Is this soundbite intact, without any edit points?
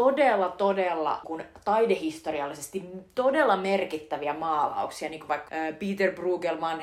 no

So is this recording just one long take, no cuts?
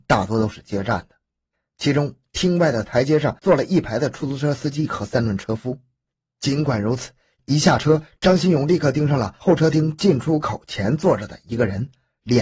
yes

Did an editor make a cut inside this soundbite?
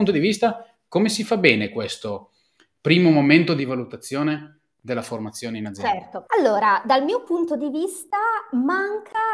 no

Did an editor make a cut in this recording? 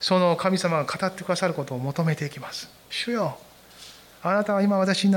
yes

